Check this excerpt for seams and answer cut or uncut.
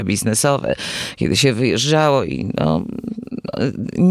uncut